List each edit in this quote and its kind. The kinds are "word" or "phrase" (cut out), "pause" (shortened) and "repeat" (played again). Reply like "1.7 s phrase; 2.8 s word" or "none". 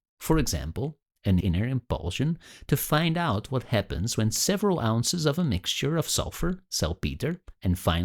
1.4 s word